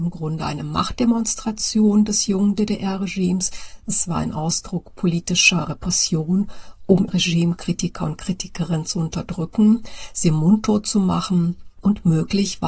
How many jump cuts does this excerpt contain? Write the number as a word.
one